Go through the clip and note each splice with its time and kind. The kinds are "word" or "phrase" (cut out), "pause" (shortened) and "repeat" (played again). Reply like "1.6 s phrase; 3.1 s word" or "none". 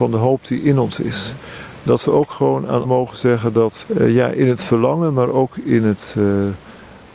2.8 s word; 3.8 s word

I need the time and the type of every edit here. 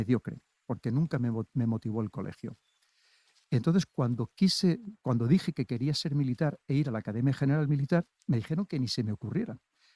none

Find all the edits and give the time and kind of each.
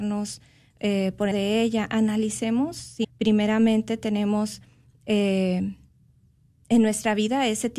1.3 s word; 3.0 s word

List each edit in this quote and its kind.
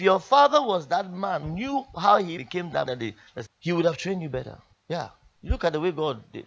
1.4 s word; 2.4 s word; 2.9 s word; 3.5 s word

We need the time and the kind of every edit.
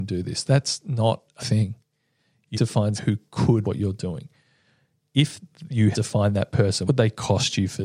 1.4 s word; 2.5 s word; 3.0 s word; 3.6 s word; 5.9 s word; 6.9 s word

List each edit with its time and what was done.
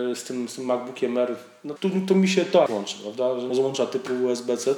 1.8 s word; 2.7 s word; 3.5 s word

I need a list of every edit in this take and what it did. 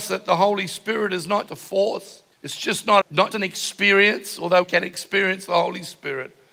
1.5 s word; 2.3 s pause; 3.0 s word; 3.3 s word; 4.6 s word

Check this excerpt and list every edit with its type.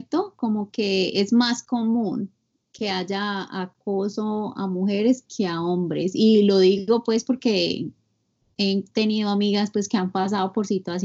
none

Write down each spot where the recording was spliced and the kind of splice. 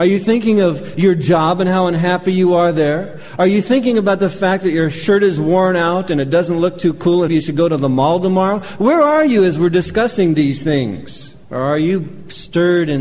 7.3 s word; 11.4 s pause

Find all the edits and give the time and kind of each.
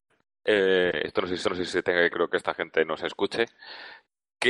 1.4 s repeat; 2.1 s phrase

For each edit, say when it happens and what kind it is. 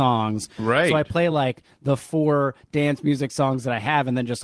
none

